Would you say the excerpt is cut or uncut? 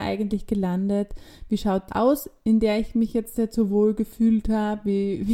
cut